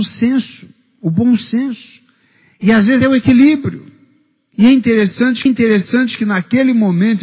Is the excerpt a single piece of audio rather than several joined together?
no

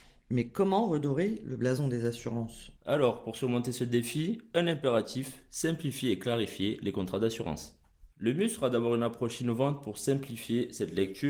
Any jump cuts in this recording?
yes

